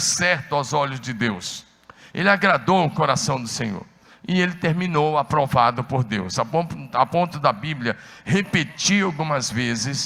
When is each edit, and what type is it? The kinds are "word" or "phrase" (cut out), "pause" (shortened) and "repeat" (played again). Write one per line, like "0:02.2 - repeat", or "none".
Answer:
none